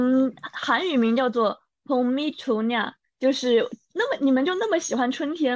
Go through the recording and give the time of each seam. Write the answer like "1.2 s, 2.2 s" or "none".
none